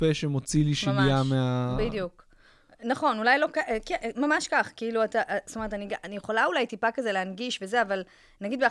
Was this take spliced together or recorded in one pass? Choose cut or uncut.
uncut